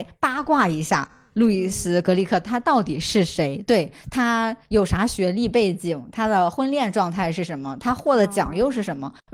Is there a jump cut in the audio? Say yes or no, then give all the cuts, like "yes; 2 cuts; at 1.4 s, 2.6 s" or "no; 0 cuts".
no; 0 cuts